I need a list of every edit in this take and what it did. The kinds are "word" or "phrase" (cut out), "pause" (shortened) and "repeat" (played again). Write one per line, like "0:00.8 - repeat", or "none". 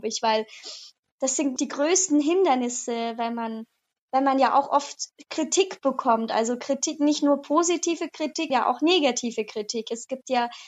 0:01.6 - word
0:08.5 - word